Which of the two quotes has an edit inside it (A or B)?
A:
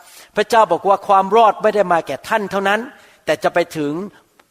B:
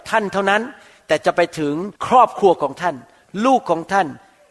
B